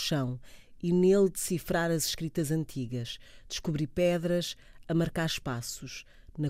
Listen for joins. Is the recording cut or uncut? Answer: uncut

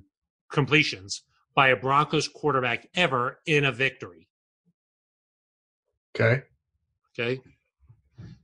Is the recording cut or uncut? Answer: uncut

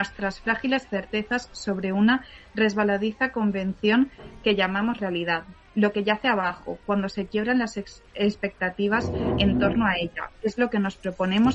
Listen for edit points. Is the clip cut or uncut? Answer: uncut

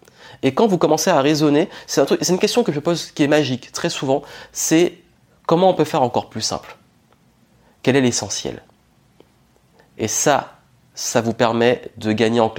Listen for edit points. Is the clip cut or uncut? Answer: uncut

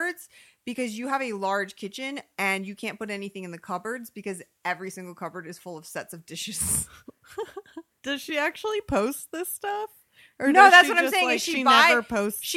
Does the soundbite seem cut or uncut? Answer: uncut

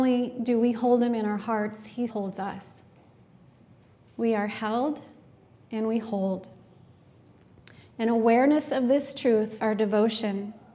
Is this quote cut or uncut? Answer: cut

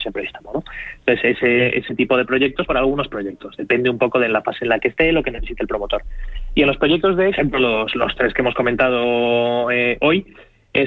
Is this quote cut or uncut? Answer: cut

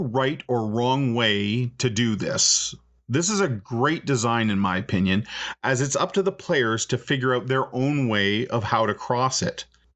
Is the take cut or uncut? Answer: uncut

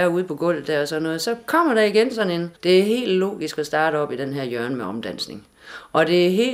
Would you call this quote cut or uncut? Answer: cut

